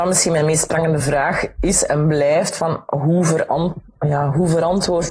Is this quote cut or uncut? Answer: uncut